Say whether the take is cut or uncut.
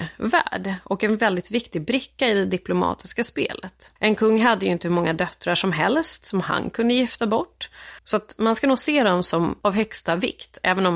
cut